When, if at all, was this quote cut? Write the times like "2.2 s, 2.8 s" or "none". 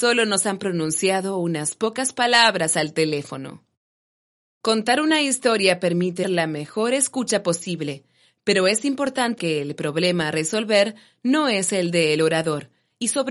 6.2 s, 9.4 s